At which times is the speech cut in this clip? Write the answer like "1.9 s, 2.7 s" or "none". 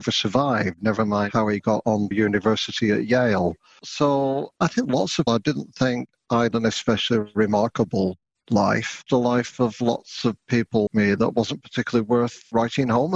2.1 s, 4.8 s, 5.3 s, 6.5 s, 9.1 s, 10.9 s